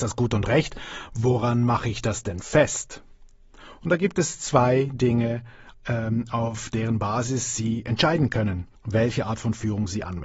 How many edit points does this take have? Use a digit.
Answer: 1